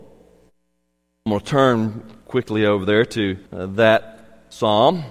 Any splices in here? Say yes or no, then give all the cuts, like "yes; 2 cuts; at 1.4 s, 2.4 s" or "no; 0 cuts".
yes; 2 cuts; at 2.2 s, 3.5 s